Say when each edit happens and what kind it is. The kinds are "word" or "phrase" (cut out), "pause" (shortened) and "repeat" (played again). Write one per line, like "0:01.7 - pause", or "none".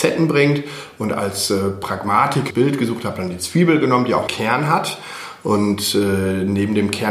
0:02.5 - phrase
0:04.3 - word